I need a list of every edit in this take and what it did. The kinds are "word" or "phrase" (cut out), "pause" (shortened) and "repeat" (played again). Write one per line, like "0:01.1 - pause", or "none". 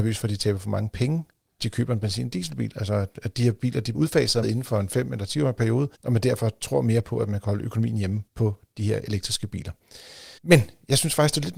0:01.6 - word
0:03.9 - word
0:04.4 - word
0:05.9 - pause
0:08.3 - pause
0:10.4 - pause